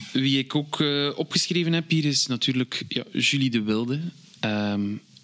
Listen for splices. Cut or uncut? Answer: uncut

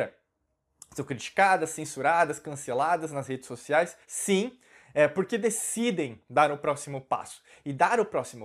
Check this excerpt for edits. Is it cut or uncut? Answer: cut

